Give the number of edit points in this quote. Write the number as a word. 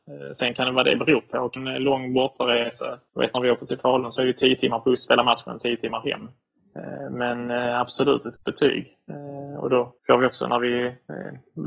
four